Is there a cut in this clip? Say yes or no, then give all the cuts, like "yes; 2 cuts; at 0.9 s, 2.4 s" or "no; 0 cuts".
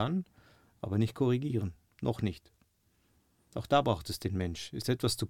no; 0 cuts